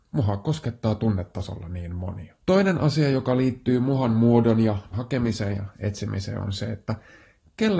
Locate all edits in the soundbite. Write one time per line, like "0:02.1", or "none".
0:02.4
0:04.9